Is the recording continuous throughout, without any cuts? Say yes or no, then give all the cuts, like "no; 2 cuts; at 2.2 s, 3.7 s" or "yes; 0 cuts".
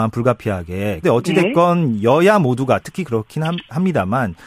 no; 2 cuts; at 1.0 s, 2.8 s